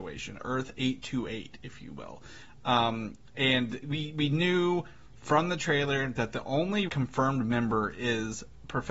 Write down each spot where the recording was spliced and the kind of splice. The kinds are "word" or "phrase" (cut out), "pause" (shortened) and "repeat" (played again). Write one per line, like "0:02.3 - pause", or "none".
0:03.8 - word
0:06.9 - word